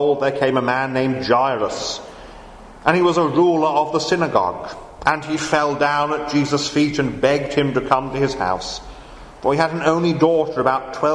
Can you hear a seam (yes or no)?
no